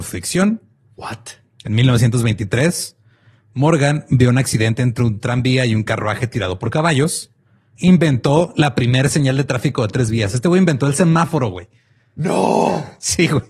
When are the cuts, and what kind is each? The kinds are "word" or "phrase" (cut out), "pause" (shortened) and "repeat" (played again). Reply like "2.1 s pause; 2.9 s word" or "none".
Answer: none